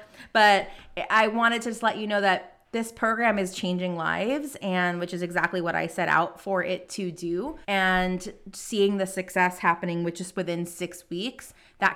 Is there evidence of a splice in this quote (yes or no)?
yes